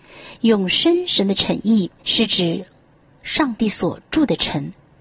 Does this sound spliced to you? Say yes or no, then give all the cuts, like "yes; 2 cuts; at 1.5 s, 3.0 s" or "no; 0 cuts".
yes; 1 cut; at 2.0 s